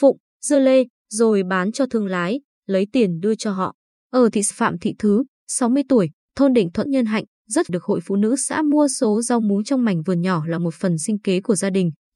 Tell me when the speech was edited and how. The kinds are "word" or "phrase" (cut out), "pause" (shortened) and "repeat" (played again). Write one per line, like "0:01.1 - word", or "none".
0:04.5 - phrase
0:06.9 - word
0:07.7 - phrase